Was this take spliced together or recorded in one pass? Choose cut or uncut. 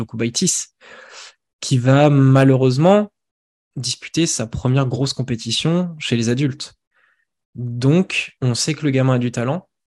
cut